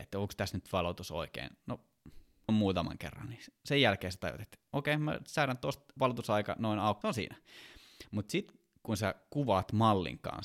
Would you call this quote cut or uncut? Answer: cut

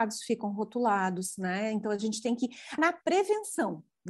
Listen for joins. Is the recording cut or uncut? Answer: cut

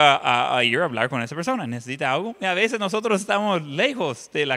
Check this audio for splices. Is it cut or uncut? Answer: uncut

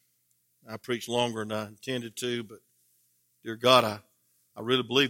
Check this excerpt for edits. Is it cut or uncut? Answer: uncut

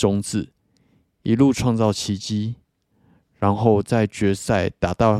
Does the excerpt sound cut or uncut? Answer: uncut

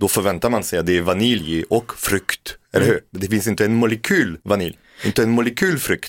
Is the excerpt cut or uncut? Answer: cut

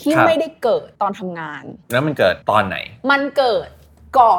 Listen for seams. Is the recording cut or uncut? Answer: cut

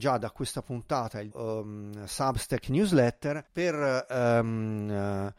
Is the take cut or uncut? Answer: cut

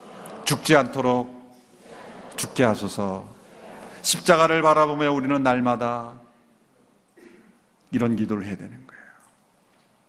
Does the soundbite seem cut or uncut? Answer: uncut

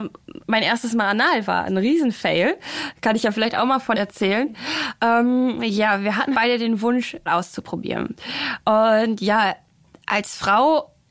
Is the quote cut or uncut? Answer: cut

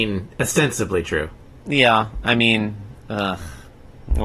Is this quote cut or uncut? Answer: uncut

